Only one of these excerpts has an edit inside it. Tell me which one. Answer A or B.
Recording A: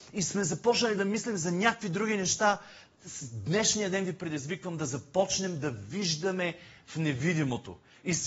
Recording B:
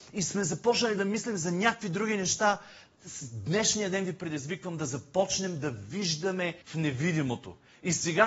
B